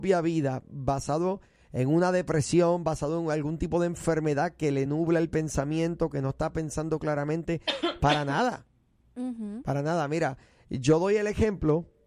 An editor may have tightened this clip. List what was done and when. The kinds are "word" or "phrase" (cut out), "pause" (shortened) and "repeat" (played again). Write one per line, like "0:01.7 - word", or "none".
none